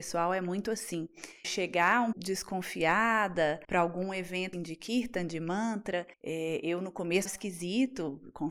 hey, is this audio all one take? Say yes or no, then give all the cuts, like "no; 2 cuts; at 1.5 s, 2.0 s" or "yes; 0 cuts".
no; 6 cuts; at 1.4 s, 2.1 s, 3.6 s, 4.5 s, 6.1 s, 7.3 s